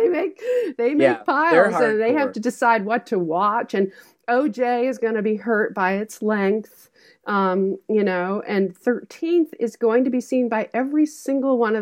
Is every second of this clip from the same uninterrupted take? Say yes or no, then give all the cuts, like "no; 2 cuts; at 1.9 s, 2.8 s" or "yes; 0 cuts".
yes; 0 cuts